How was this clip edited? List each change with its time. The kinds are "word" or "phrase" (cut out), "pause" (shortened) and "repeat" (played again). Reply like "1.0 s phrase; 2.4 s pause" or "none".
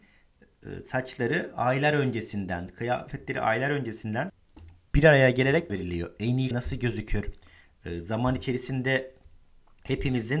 5.7 s phrase; 6.5 s word